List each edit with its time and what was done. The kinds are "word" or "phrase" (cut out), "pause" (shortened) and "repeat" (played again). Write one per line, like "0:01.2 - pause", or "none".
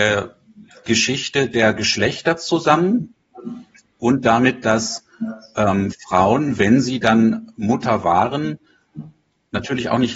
none